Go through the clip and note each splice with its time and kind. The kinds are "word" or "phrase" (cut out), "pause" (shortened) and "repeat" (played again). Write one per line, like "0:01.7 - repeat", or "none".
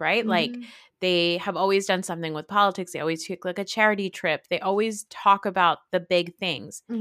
none